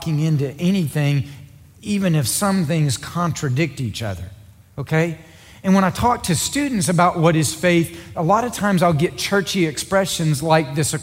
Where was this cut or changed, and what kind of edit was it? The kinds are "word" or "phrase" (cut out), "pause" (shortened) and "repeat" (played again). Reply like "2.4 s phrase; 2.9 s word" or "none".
none